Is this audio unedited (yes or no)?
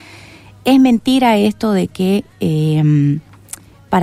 yes